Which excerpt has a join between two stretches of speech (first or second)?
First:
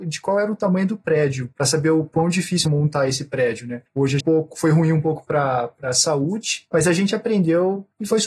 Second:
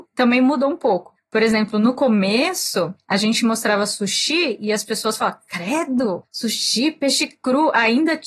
first